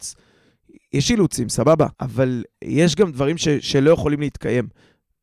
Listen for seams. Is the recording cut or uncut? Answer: cut